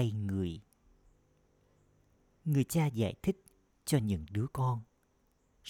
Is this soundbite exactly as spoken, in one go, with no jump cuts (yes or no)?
yes